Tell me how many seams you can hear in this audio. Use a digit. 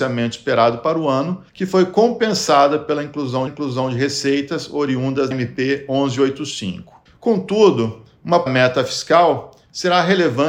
5